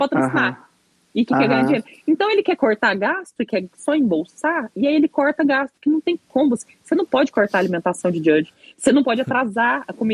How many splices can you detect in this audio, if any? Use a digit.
0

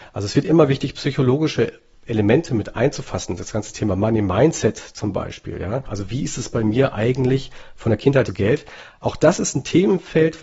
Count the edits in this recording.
1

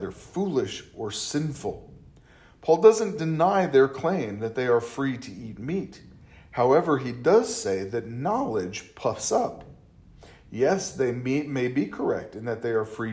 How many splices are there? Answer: 0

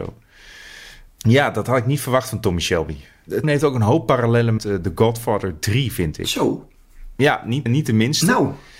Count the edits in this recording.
3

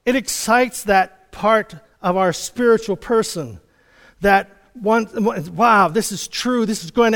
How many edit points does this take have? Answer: 0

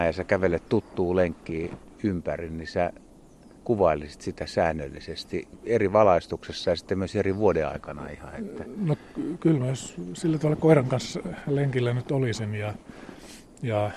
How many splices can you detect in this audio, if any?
1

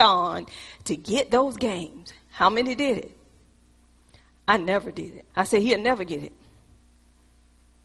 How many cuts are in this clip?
1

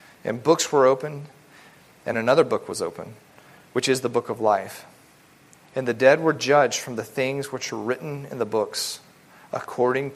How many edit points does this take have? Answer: 0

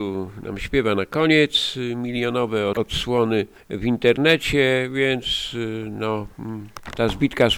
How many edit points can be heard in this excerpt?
0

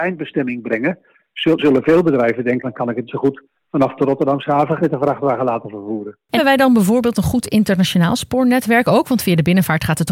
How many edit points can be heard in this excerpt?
6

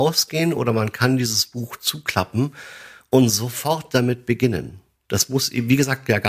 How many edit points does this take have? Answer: 0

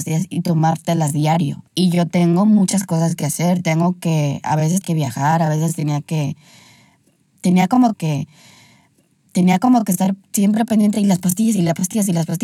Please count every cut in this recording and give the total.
3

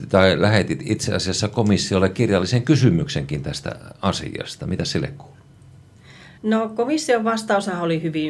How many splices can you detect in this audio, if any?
1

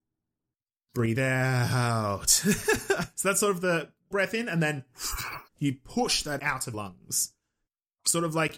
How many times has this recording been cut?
6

